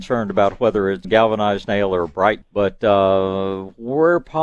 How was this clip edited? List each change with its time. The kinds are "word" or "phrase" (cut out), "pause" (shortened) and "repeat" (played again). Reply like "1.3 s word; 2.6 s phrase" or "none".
1.0 s word; 2.4 s word